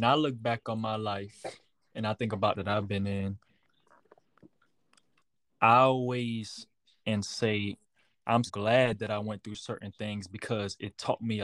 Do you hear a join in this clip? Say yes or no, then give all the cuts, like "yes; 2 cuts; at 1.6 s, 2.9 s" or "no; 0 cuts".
yes; 3 cuts; at 2.6 s, 7.0 s, 8.5 s